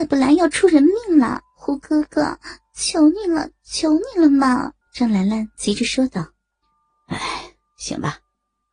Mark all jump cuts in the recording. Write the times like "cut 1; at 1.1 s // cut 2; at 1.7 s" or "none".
cut 1; at 1.5 s // cut 2; at 4.8 s // cut 3; at 6.6 s